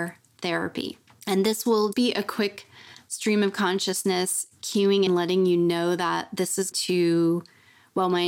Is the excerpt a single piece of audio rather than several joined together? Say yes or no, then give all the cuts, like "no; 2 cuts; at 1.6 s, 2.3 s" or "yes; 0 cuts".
no; 4 cuts; at 1.1 s, 1.9 s, 5.1 s, 6.7 s